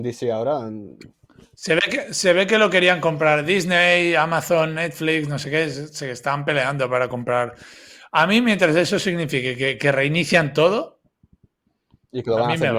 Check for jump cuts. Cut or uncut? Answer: uncut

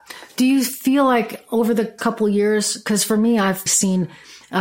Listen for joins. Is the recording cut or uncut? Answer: cut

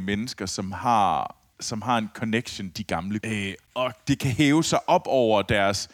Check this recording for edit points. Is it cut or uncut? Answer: cut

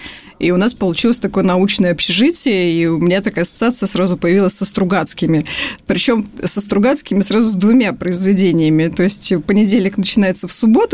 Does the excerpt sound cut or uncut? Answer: uncut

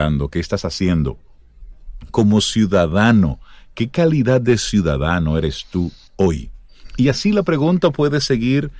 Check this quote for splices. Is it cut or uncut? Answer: uncut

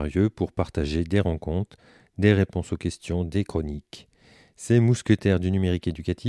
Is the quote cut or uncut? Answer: uncut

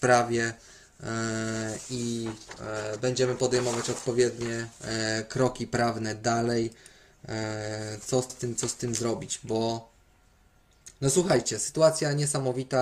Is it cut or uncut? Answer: cut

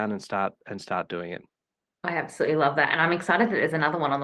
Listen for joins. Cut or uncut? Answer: uncut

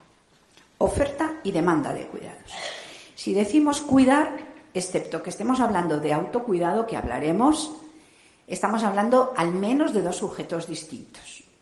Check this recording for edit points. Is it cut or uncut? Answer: uncut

